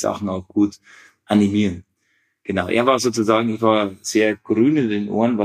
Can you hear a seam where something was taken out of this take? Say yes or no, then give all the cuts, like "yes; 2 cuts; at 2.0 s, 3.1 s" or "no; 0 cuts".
no; 0 cuts